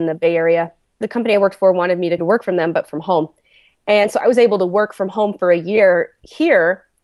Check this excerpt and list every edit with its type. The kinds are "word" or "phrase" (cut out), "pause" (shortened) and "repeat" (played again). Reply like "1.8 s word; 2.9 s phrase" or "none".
2.2 s word